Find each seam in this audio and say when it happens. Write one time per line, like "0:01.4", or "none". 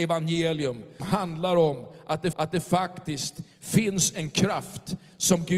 0:01.0
0:02.3